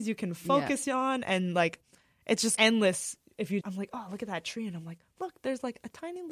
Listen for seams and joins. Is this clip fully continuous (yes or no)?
no